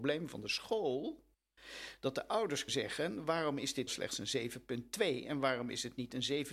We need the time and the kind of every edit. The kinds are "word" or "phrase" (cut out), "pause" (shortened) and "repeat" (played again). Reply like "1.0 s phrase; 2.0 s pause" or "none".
2.7 s word; 3.9 s word